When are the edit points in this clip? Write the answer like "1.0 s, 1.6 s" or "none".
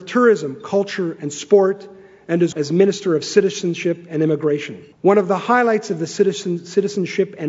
2.5 s, 4.9 s